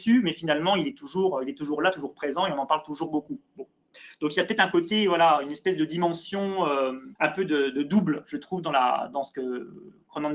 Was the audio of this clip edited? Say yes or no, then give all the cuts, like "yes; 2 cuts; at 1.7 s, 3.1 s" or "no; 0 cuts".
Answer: yes; 1 cut; at 7.2 s